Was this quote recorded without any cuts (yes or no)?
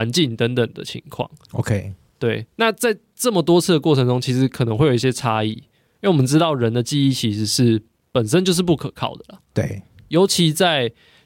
yes